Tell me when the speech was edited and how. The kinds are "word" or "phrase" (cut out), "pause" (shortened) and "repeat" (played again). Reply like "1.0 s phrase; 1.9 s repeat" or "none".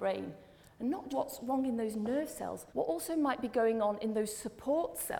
1.1 s word; 2.7 s pause